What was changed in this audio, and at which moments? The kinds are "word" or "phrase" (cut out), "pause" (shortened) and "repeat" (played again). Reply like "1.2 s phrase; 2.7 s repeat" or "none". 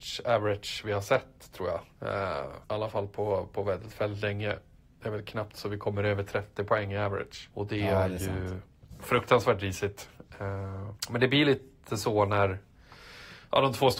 none